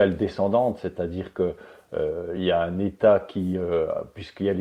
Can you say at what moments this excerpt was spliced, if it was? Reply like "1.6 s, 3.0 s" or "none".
none